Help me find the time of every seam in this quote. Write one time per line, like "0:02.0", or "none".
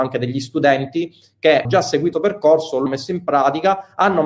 0:01.6
0:02.1
0:02.9